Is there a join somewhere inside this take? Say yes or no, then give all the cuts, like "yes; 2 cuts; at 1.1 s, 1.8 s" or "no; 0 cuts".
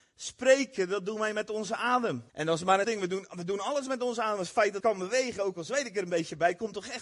yes; 3 cuts; at 2.3 s, 2.8 s, 4.8 s